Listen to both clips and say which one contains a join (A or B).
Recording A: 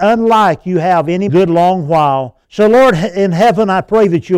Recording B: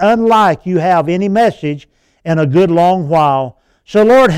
A